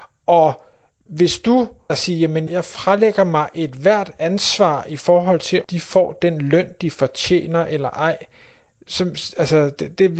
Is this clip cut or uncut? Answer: cut